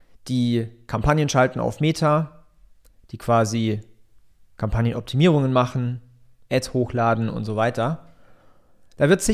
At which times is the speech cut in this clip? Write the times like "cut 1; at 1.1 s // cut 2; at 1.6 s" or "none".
none